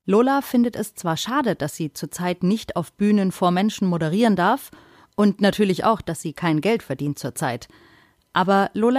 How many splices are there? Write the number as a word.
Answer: zero